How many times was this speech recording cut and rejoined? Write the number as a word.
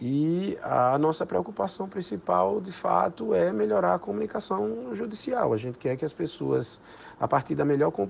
zero